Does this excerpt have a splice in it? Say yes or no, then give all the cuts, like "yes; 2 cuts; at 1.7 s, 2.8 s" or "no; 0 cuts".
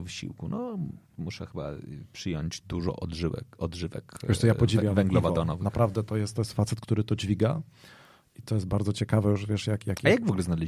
no; 0 cuts